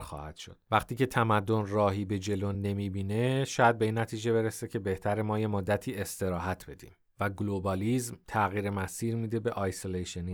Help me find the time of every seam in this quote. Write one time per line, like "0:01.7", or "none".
none